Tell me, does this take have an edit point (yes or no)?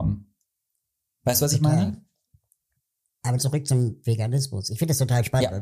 yes